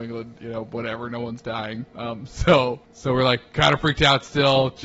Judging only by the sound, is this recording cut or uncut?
cut